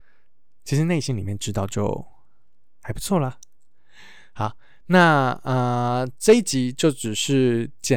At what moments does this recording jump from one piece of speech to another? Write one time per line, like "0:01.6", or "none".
none